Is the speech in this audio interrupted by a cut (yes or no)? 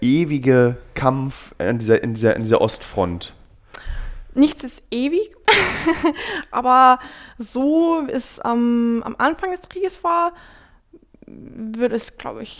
no